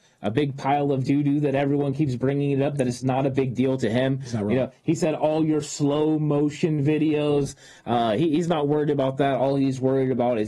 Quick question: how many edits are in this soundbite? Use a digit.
0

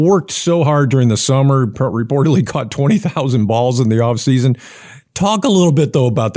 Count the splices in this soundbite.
0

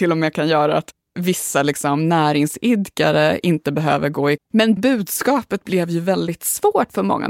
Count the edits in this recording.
2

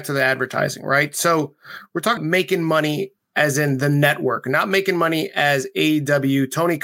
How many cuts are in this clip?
1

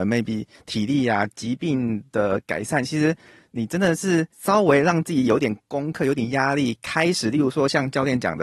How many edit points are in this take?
1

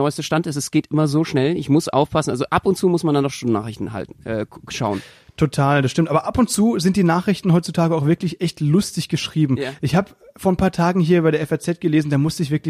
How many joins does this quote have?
0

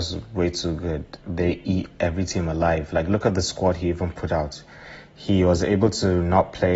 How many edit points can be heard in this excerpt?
1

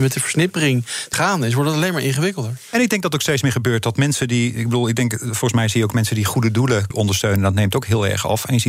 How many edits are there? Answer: 2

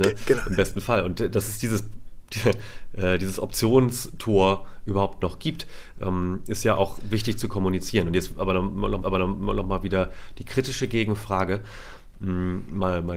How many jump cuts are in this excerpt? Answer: 1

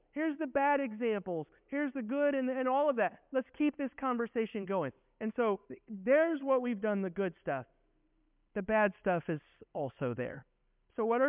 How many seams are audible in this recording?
1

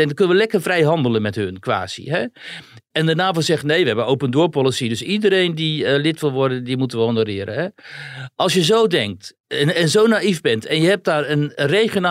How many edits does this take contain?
1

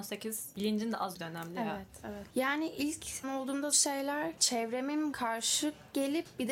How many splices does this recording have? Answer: 4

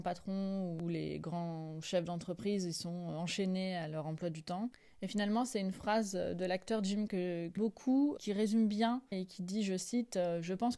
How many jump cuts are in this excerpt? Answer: 4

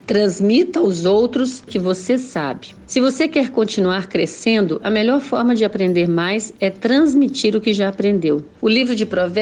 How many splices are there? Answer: 1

